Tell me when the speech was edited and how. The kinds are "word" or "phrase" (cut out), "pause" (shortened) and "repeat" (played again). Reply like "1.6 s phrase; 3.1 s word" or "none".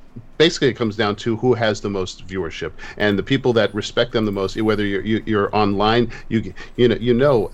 none